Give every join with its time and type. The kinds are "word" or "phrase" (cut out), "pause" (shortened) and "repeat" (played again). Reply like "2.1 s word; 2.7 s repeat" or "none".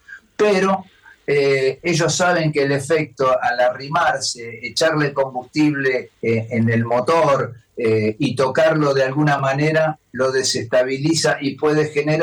6.1 s pause

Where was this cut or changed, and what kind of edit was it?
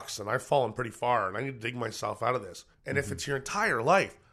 2.7 s pause

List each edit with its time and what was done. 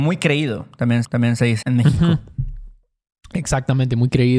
1.0 s repeat; 1.6 s word

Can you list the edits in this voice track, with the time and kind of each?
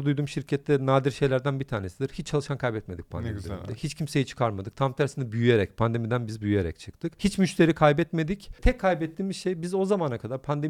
none

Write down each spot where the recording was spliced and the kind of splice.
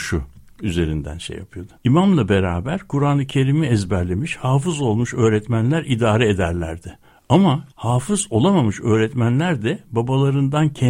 1.8 s pause; 7.7 s pause

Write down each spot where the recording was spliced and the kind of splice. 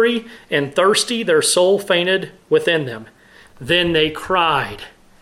none

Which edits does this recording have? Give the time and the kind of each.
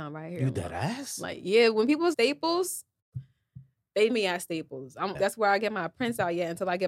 2.1 s phrase; 4.1 s word; 5.1 s word

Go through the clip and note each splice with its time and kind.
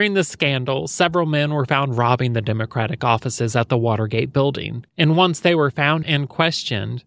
4.9 s pause; 6.0 s word

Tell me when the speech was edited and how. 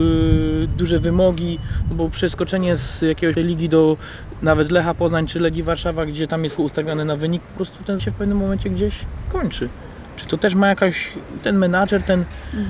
3.4 s phrase; 6.6 s word; 8.0 s word; 11.4 s word

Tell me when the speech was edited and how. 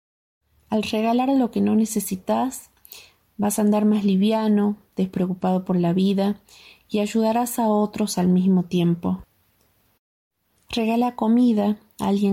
none

